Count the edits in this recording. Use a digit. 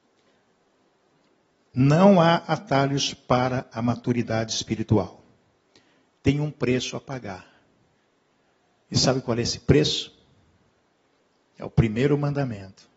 0